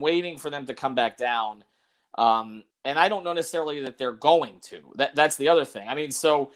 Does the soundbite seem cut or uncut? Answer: cut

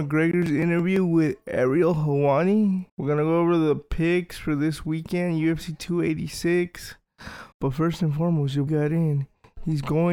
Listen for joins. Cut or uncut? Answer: cut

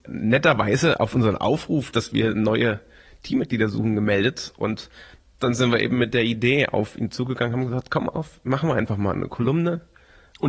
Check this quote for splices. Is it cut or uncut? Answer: uncut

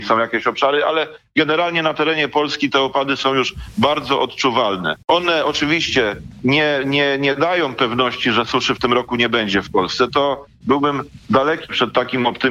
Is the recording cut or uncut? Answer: cut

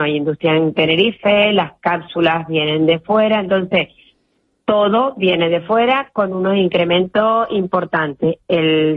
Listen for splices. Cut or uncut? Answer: uncut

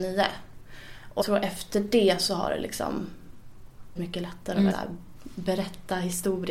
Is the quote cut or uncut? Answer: cut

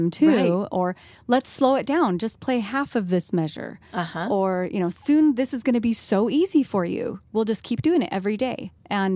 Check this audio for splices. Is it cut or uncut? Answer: uncut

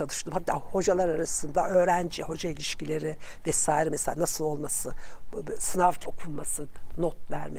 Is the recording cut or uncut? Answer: cut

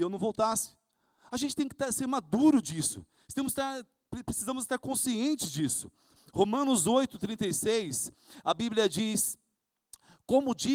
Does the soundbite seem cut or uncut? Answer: uncut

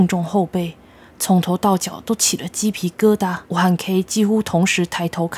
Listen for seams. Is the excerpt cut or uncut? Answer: cut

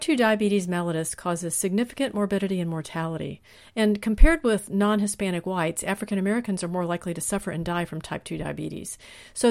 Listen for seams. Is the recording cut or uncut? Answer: uncut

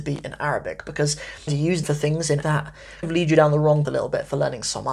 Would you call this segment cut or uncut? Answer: cut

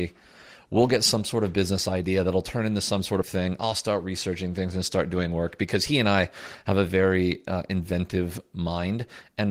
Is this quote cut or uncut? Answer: cut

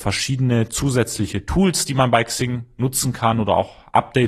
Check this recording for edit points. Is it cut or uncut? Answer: uncut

